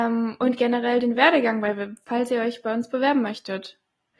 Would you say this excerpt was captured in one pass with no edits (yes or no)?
yes